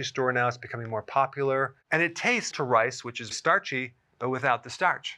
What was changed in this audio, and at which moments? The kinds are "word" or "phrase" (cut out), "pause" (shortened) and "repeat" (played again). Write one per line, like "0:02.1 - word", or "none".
0:02.5 - phrase
0:03.3 - word

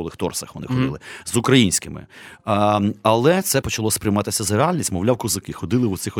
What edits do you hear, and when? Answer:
0:03.6 - word

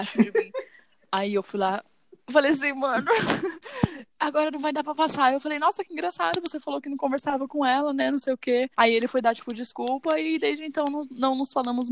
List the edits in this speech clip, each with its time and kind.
0:08.7 - pause

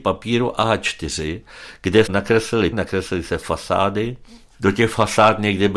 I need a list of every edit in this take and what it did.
0:02.1 - word
0:02.7 - word

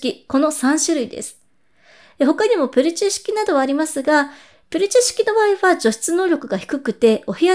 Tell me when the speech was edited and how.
none

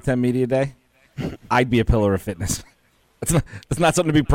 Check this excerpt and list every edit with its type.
none

